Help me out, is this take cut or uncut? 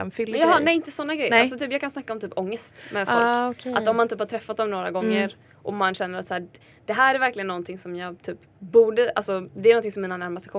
uncut